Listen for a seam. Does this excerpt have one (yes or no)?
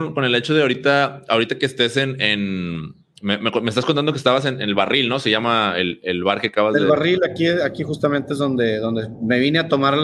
no